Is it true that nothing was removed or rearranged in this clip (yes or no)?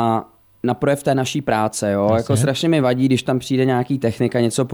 yes